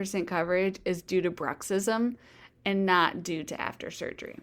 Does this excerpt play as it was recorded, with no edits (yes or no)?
yes